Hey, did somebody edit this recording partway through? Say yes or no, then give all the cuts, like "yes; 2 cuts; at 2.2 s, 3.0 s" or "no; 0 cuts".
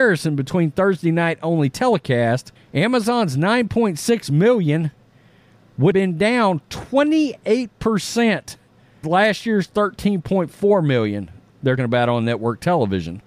yes; 4 cuts; at 2.6 s, 5.9 s, 9.0 s, 11.8 s